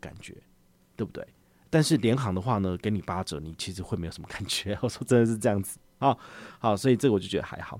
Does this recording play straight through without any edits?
yes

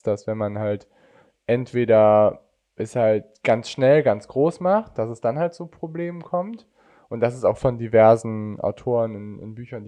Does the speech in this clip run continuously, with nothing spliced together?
yes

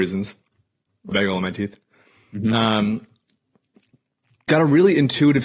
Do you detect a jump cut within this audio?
yes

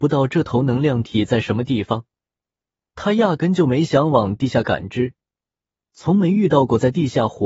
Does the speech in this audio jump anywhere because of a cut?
no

